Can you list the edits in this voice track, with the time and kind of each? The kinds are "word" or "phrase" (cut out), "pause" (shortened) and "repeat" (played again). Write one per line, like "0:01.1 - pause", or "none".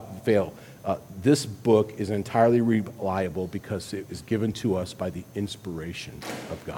none